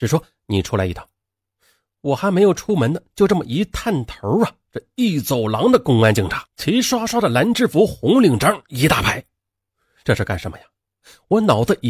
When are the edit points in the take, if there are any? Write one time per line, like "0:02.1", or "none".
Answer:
none

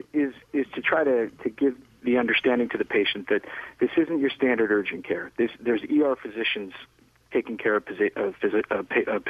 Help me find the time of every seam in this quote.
0:01.9

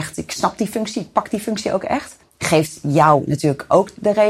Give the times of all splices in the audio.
0:02.2

